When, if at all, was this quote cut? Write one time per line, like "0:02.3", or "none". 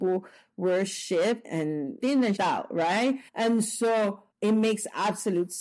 0:02.0
0:02.4
0:03.3
0:04.3